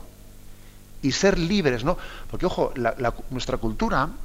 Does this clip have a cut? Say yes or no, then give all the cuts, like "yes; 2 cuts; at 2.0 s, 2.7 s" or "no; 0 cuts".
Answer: no; 0 cuts